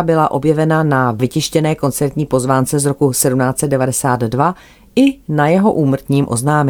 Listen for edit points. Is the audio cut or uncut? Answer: uncut